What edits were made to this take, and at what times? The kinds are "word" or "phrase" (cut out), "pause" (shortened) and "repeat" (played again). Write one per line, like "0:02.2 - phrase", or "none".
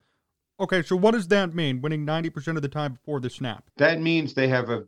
0:03.7 - pause